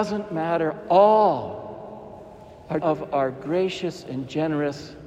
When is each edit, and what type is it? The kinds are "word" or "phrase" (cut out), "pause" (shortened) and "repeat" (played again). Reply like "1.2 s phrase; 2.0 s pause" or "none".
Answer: 2.8 s word